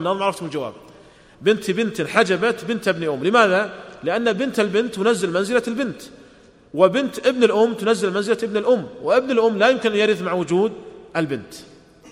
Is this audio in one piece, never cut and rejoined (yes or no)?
yes